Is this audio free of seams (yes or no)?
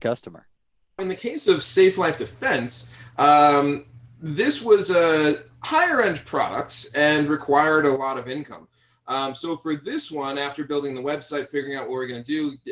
no